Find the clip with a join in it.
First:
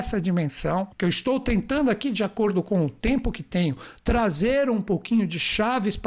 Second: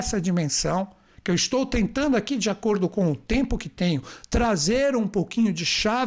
first; 1 cut; at 0.9 s

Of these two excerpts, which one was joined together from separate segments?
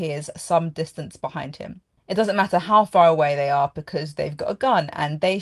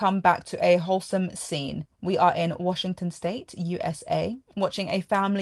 second; 1 cut; at 1.9 s

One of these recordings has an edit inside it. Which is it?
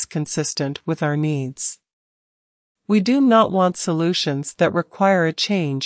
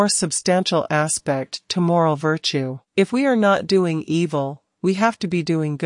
second; 1 cut; at 2.9 s

